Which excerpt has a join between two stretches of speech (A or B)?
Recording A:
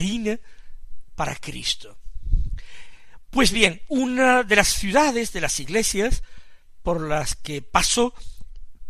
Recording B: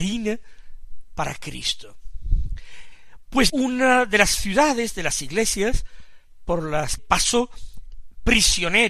B